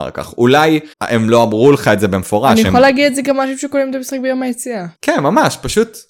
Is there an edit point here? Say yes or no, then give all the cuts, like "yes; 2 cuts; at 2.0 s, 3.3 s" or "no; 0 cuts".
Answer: yes; 2 cuts; at 0.9 s, 4.9 s